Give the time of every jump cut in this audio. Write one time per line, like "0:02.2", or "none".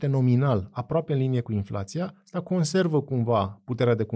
none